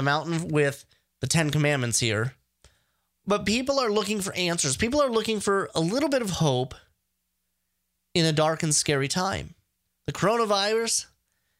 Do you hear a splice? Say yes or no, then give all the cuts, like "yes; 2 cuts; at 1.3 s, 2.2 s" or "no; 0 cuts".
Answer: no; 0 cuts